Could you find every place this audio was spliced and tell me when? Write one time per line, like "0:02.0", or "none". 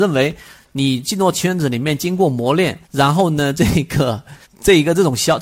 0:02.8
0:04.4